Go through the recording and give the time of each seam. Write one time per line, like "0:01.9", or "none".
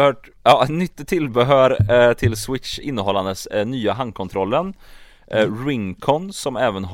none